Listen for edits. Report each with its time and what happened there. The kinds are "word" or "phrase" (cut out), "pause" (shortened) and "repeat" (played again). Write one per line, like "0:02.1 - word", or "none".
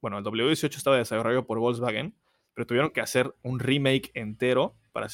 none

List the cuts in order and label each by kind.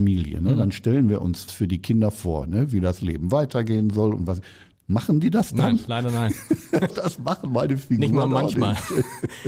0:01.5 - word
0:06.9 - word

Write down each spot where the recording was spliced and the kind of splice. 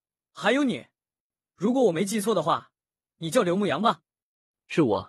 none

